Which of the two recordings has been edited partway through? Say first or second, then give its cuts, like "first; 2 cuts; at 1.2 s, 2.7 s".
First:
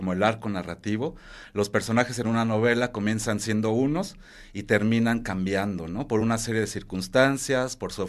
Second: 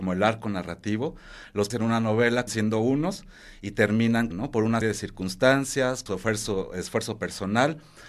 second; 5 cuts; at 1.7 s, 2.5 s, 4.3 s, 4.8 s, 6.1 s